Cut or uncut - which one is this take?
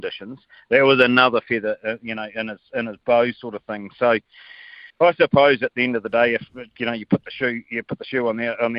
cut